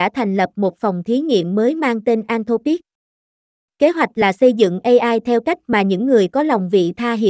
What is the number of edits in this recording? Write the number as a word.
zero